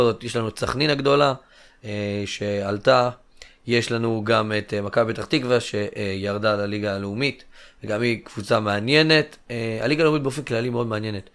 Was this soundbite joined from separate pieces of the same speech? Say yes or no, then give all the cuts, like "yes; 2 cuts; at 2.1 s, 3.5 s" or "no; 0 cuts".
no; 0 cuts